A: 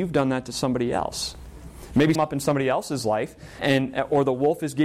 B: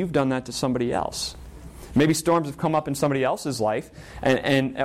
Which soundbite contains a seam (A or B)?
A